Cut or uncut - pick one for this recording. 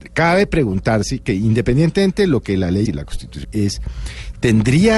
cut